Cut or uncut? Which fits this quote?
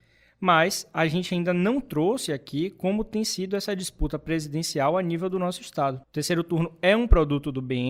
cut